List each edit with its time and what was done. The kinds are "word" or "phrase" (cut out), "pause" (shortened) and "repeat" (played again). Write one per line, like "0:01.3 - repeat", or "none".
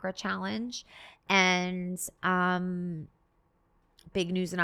none